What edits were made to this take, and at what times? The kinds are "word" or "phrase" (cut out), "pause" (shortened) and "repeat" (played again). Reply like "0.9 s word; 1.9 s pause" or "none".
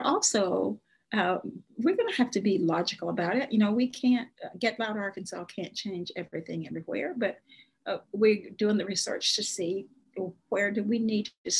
none